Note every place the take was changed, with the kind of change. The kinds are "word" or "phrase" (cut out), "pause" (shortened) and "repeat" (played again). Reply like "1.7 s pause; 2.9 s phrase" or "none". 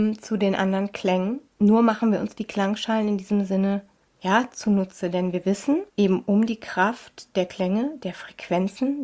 1.5 s pause; 4.0 s pause; 5.9 s pause